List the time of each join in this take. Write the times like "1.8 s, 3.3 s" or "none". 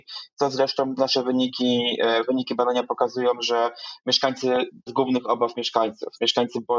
4.9 s